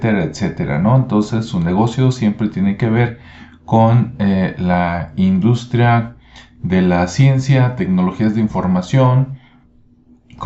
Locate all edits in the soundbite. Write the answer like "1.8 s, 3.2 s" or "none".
none